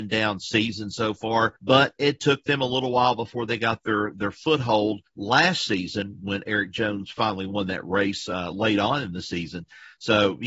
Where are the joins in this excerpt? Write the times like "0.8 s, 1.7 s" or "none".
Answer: 1.6 s, 5.1 s